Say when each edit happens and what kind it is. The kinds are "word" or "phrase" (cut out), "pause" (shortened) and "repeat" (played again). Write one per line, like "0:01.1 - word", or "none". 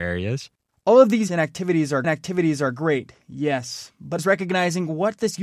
0:01.3 - word
0:02.0 - repeat
0:04.2 - phrase